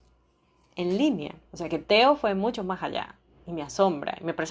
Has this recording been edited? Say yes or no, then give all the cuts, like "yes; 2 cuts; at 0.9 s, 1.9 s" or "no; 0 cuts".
yes; 1 cut; at 1.4 s